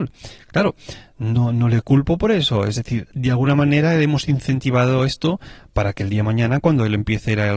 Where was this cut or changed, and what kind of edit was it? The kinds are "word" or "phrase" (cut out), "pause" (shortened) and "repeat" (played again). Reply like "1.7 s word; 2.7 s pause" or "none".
none

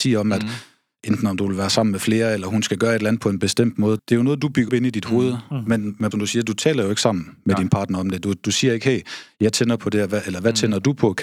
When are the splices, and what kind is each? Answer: 4.0 s word; 4.7 s word; 6.1 s word

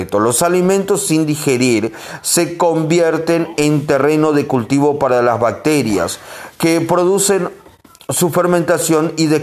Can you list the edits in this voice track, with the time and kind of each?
none

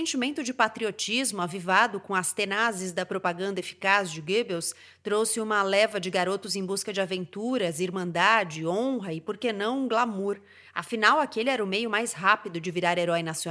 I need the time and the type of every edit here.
none

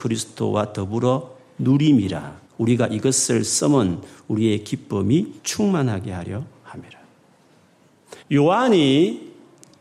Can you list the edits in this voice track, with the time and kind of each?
2.5 s pause; 5.4 s pause; 8.2 s pause

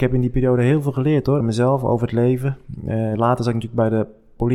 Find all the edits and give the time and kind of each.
1.4 s word

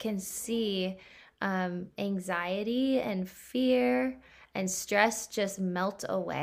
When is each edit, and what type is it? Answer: none

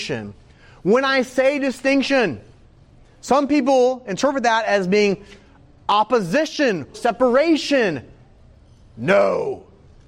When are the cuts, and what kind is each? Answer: 6.9 s word

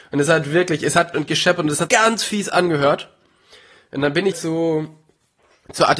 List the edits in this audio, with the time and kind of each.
1.1 s word; 1.9 s word; 4.3 s word

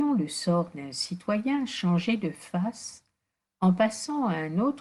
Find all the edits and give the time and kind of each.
none

